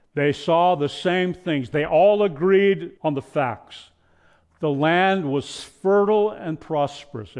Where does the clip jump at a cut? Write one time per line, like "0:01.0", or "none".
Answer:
0:03.0